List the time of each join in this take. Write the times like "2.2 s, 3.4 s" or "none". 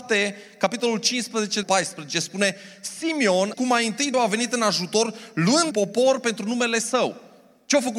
1.6 s, 3.5 s, 4.1 s, 5.7 s